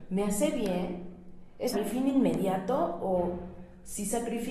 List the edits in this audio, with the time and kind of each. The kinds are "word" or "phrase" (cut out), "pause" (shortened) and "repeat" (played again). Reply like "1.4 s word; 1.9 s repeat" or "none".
1.7 s word